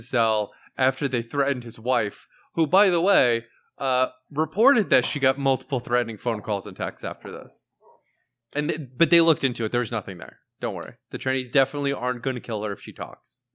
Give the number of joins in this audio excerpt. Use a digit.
0